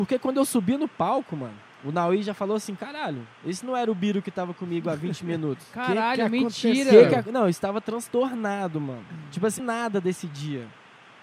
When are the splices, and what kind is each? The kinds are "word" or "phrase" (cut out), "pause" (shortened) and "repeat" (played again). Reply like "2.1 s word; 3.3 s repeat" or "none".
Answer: 9.6 s phrase